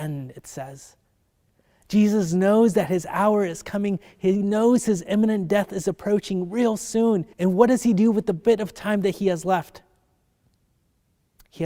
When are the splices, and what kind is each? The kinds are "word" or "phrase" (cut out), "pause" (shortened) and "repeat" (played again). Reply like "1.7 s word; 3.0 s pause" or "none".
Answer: 7.3 s pause